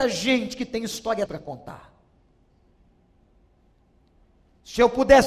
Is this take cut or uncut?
cut